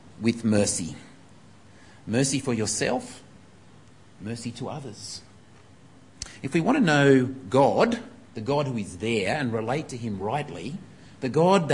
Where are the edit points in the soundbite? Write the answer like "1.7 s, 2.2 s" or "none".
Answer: none